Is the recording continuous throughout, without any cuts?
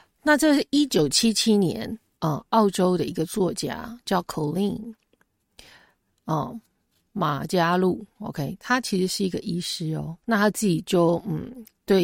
no; 1 cut; at 10.2 s

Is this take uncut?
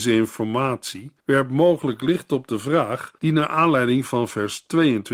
no; 2 cuts; at 1.2 s, 3.2 s

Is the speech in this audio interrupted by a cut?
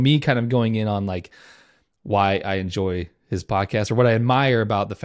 no; 0 cuts

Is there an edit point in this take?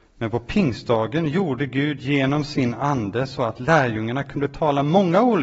no; 0 cuts

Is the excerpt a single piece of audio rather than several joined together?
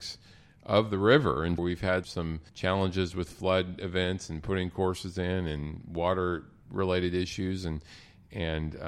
no; 3 cuts; at 1.6 s, 2.0 s, 2.5 s

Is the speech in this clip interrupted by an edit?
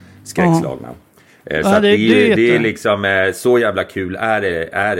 no; 0 cuts

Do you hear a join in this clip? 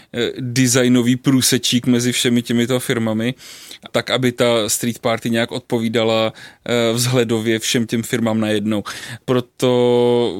no; 0 cuts

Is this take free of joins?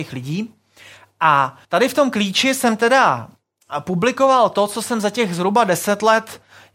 no; 1 cut; at 1.6 s

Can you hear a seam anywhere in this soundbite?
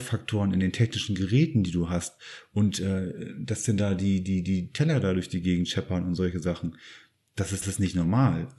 yes; 1 cut; at 7.6 s

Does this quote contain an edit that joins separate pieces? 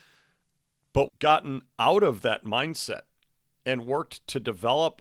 yes; 1 cut; at 1.1 s

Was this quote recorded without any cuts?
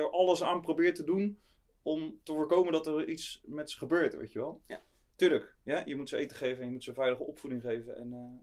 yes; 0 cuts

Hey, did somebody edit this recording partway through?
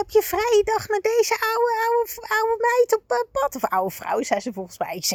no; 0 cuts

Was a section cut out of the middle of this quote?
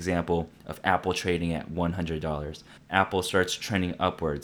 yes; 1 cut; at 2.8 s

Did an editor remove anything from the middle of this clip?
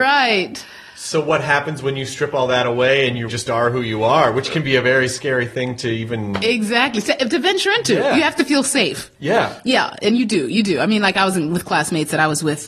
yes; 1 cut; at 3.3 s

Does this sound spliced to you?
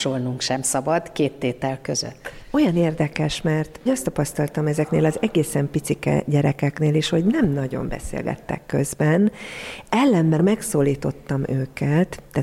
yes; 2 cuts; at 3.9 s, 10.4 s

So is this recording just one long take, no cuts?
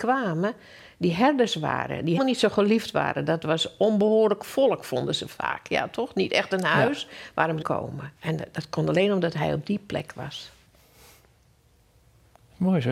no; 3 cuts; at 2.2 s, 7.6 s, 8.2 s

